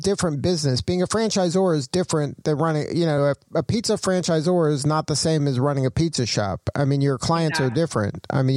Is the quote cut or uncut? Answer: uncut